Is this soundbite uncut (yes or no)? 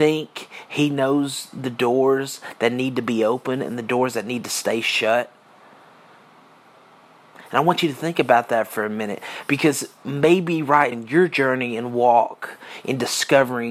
no